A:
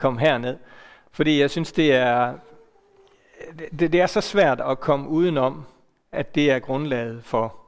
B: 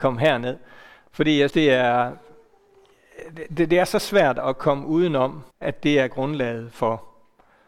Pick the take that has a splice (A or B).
B